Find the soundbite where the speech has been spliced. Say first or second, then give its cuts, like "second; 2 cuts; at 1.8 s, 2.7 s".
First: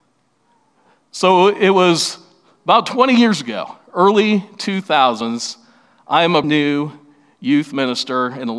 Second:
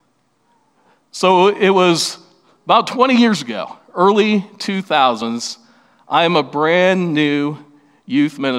first; 1 cut; at 6.4 s